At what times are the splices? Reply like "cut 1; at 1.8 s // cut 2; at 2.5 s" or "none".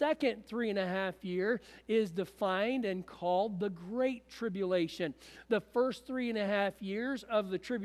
none